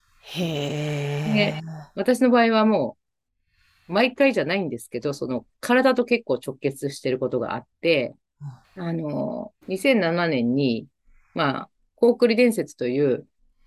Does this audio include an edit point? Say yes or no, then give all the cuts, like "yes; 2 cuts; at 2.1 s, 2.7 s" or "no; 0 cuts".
yes; 2 cuts; at 8.6 s, 9.6 s